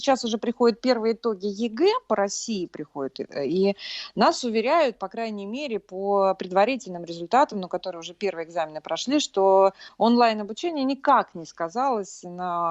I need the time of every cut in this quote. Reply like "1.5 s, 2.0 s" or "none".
none